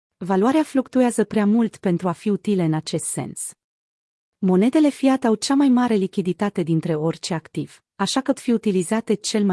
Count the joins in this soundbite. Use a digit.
1